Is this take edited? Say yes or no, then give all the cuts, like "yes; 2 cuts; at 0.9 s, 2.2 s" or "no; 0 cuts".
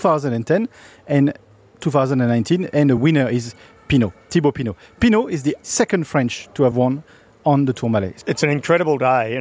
no; 0 cuts